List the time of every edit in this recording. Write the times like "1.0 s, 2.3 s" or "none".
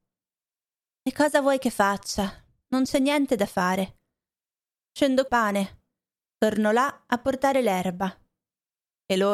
5.3 s